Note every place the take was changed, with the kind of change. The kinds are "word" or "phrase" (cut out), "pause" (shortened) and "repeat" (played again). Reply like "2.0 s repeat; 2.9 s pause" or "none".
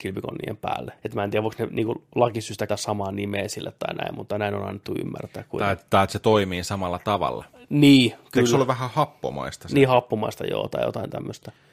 1.0 s pause; 2.7 s word